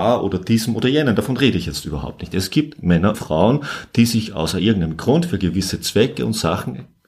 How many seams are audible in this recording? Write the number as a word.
one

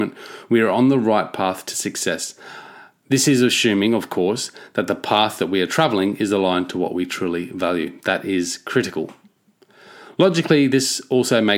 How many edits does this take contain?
zero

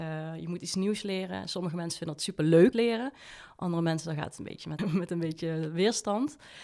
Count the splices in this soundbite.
two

